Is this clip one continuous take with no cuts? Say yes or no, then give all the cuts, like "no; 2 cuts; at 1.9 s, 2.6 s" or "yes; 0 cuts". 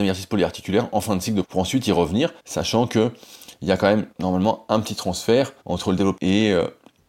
no; 5 cuts; at 1.4 s, 2.4 s, 4.1 s, 5.6 s, 6.2 s